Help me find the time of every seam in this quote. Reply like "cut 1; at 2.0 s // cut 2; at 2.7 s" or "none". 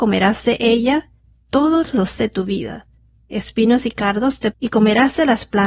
cut 1; at 2.2 s // cut 2; at 4.5 s